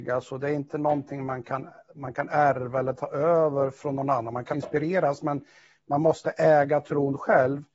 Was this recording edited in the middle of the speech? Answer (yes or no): yes